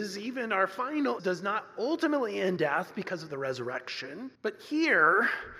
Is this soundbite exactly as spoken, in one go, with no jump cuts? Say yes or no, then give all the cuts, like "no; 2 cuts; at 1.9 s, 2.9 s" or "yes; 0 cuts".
no; 4 cuts; at 1.2 s, 2.6 s, 3.3 s, 4.4 s